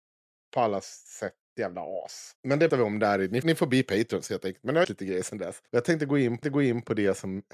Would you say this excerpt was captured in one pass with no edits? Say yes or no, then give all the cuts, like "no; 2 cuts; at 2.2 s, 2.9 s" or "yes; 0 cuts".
no; 7 cuts; at 1.4 s, 2.4 s, 2.7 s, 3.4 s, 4.8 s, 5.7 s, 6.4 s